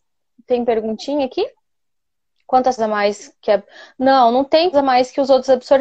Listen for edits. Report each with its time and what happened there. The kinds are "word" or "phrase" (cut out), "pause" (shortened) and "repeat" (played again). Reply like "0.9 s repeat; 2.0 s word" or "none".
2.8 s word; 4.7 s word